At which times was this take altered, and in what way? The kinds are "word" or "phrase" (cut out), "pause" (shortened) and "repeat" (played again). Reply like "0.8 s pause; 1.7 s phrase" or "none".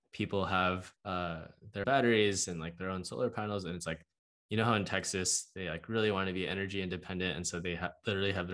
1.0 s pause; 1.8 s word